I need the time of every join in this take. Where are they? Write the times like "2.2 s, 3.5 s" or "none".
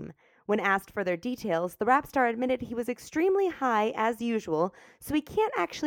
none